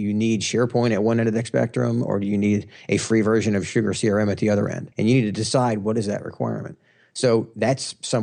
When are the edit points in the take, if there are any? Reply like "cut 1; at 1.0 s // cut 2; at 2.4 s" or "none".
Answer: cut 1; at 4.9 s